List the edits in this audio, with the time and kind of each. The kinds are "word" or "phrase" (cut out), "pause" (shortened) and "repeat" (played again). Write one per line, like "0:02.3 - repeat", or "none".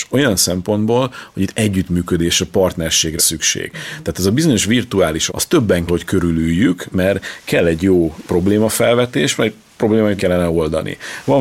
0:03.2 - word
0:05.3 - word
0:05.9 - word
0:10.2 - word